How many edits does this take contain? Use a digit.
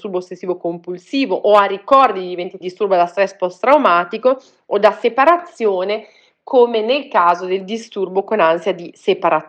1